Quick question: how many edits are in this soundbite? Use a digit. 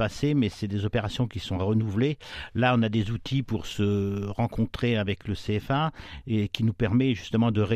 0